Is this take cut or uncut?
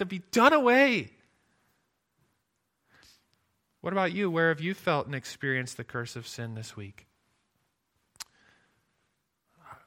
uncut